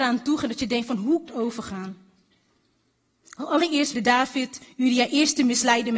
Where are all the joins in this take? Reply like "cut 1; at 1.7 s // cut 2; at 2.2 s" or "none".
cut 1; at 1.3 s // cut 2; at 3.9 s